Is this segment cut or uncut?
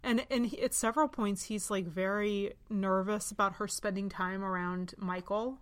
uncut